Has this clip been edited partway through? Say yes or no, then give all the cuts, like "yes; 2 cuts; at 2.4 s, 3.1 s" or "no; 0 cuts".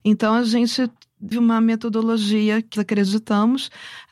yes; 2 cuts; at 1.3 s, 2.8 s